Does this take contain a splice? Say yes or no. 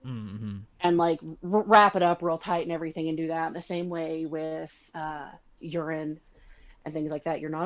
no